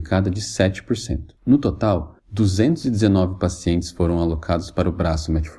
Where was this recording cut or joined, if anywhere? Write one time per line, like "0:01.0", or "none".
0:01.4
0:02.2